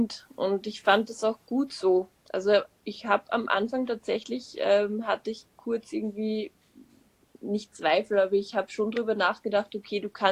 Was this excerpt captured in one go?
yes; 0 cuts

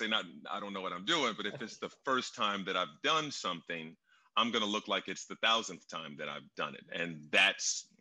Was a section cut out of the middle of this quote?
no; 0 cuts

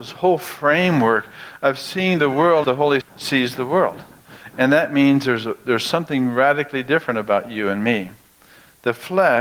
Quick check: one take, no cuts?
no; 2 cuts; at 2.6 s, 3.0 s

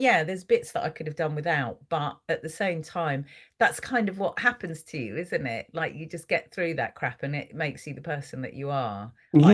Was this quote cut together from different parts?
no; 0 cuts

